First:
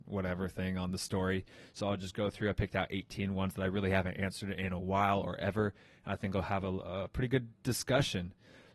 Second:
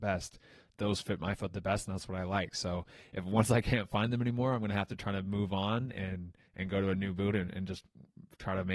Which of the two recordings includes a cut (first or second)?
second